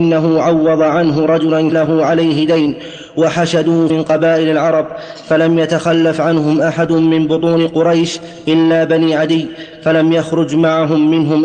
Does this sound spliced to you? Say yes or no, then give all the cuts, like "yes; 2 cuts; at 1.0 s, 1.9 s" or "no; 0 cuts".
yes; 2 cuts; at 1.7 s, 3.9 s